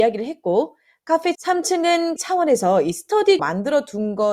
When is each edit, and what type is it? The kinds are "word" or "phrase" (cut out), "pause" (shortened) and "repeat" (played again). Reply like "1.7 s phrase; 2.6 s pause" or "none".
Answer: 1.3 s word; 2.2 s word; 3.4 s word